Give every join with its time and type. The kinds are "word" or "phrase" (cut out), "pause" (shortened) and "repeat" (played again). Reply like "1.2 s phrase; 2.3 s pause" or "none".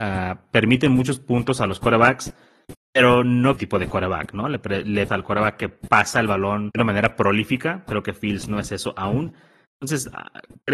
3.6 s phrase; 5.1 s phrase; 6.7 s word